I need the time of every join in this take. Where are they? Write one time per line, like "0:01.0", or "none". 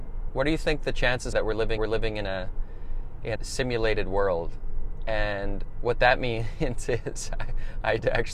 0:01.3
0:01.8
0:03.4